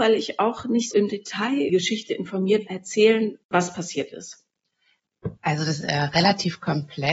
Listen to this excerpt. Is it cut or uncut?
cut